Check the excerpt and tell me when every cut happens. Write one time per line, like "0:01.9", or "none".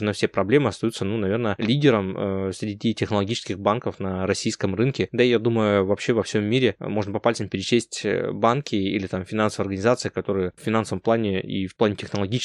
0:10.6